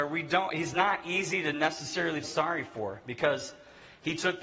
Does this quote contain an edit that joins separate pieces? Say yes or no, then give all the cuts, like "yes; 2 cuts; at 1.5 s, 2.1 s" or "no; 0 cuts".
yes; 1 cut; at 2.2 s